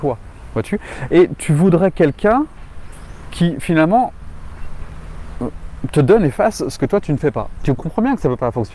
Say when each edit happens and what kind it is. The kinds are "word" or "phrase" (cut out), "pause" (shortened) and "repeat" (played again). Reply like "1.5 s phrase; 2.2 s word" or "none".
none